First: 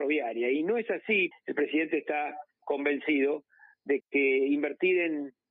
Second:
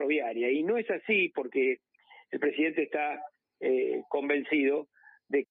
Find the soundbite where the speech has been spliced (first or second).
first